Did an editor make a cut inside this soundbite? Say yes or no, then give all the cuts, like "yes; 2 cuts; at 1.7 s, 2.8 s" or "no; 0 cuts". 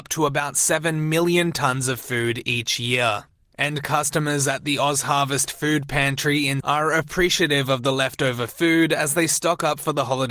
yes; 1 cut; at 6.6 s